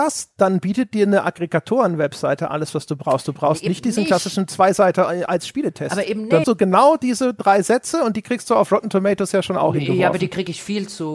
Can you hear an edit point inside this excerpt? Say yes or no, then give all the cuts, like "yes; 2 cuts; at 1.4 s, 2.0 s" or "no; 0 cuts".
yes; 1 cut; at 6.4 s